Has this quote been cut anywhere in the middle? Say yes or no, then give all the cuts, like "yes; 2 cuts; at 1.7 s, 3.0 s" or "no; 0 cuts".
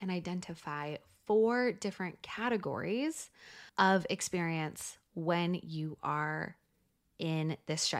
yes; 1 cut; at 3.7 s